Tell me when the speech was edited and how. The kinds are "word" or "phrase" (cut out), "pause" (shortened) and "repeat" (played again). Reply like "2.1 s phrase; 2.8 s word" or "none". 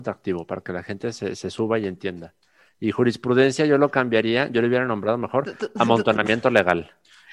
none